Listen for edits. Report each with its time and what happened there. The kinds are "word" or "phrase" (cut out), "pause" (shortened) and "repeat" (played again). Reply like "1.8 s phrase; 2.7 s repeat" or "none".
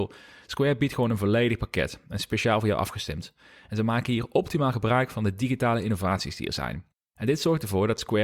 none